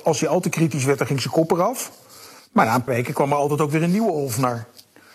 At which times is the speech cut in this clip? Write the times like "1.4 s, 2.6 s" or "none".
2.4 s, 2.9 s